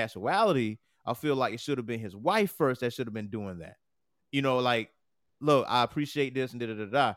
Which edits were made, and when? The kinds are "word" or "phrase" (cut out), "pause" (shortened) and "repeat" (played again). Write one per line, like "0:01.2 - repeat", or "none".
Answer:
none